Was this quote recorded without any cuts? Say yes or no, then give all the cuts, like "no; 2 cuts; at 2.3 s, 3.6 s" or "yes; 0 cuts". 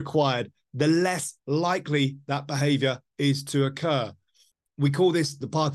yes; 0 cuts